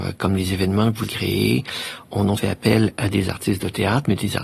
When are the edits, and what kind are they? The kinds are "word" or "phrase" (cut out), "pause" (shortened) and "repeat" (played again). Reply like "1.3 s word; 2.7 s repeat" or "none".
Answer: 1.1 s word; 2.4 s word